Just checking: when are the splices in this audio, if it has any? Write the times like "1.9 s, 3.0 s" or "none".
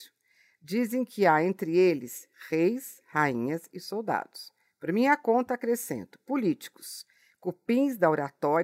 none